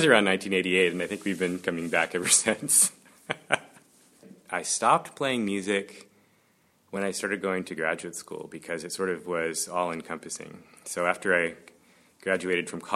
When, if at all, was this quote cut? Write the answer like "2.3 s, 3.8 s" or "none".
none